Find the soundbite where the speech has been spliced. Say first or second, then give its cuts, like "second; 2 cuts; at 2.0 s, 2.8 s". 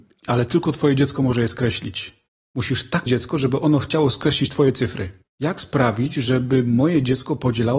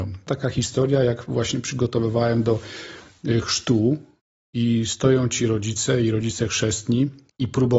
first; 1 cut; at 3.1 s